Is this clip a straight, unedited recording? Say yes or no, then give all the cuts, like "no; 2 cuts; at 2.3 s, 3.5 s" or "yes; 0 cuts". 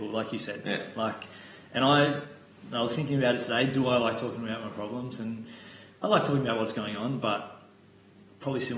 yes; 0 cuts